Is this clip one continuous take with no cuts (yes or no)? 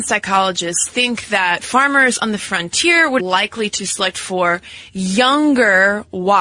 no